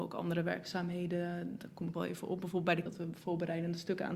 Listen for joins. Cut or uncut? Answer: cut